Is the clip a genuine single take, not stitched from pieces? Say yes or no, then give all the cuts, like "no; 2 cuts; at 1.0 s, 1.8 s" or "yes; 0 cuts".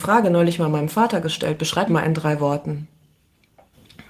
no; 1 cut; at 1.9 s